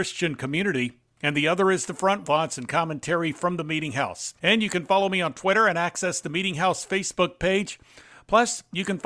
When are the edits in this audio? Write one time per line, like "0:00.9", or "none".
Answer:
0:02.2
0:04.4